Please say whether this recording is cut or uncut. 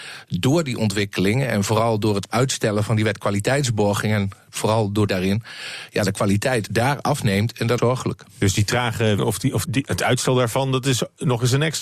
cut